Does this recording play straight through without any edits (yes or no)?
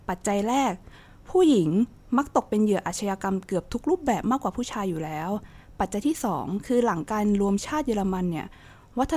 yes